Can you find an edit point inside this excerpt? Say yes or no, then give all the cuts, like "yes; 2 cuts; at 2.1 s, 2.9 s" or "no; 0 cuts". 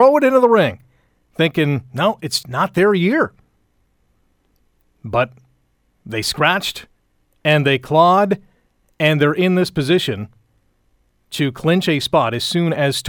yes; 1 cut; at 2.4 s